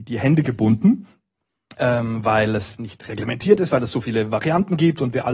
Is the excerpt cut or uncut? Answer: uncut